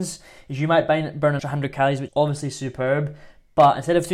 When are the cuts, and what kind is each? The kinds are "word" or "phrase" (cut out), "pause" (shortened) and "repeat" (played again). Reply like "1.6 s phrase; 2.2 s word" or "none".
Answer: 1.4 s word; 2.1 s word